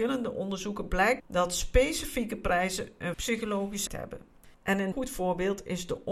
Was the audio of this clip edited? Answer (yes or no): yes